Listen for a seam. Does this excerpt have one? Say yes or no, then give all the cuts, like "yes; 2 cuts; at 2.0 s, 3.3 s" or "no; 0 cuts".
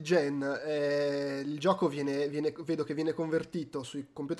no; 0 cuts